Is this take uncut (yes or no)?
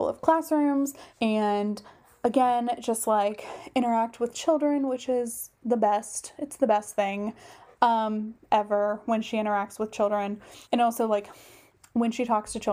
no